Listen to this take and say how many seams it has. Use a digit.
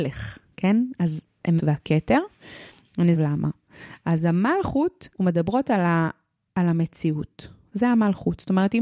3